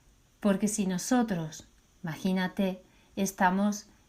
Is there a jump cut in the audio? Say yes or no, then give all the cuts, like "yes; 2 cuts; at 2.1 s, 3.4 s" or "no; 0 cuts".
no; 0 cuts